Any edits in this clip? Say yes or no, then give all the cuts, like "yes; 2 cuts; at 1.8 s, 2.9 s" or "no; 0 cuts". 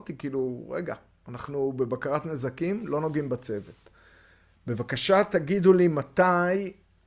no; 0 cuts